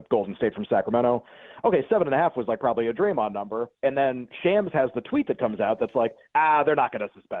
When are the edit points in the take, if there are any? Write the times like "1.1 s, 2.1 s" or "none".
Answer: 3.7 s